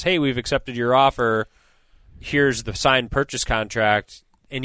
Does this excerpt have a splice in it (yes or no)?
no